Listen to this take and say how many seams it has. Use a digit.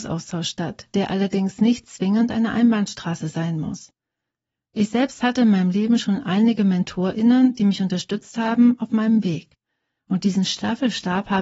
0